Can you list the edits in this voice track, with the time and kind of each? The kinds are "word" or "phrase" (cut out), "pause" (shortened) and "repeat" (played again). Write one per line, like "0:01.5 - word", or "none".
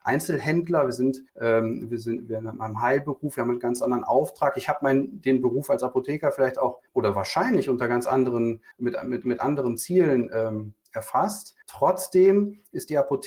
0:01.3 - pause
0:06.9 - pause
0:08.7 - pause
0:11.6 - pause